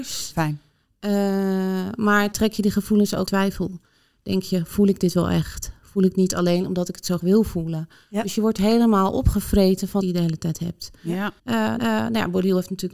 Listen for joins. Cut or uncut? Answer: cut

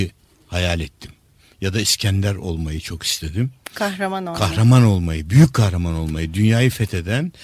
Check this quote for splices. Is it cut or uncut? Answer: uncut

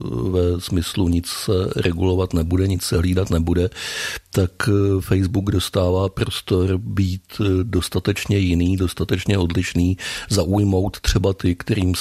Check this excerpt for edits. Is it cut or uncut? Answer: uncut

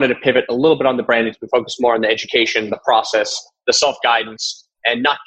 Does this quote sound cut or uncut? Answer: uncut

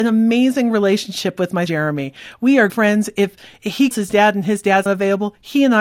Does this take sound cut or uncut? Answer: cut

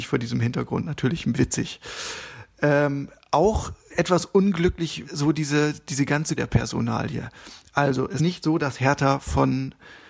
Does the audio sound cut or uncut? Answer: cut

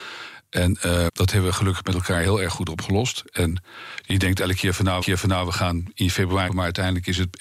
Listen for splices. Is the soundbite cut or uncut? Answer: cut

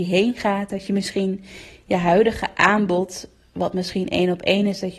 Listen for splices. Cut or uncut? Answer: uncut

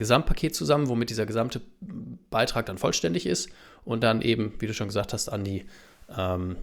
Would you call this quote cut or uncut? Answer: uncut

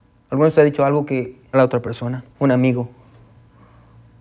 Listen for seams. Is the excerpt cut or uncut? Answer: cut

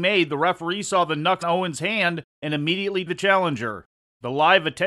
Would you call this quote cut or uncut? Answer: cut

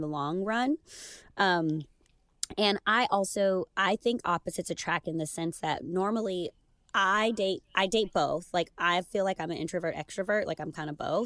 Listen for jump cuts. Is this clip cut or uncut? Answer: uncut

